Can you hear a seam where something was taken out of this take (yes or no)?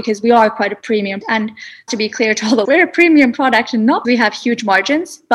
yes